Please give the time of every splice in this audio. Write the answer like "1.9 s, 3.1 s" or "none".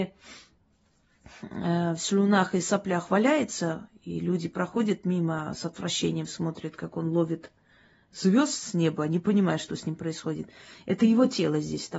none